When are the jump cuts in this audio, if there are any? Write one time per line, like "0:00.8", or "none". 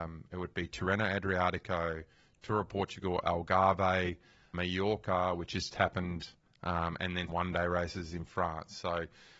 0:04.5
0:05.7
0:07.3